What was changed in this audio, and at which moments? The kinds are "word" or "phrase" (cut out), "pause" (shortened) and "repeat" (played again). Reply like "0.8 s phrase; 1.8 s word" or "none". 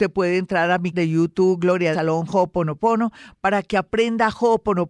0.9 s word; 1.9 s word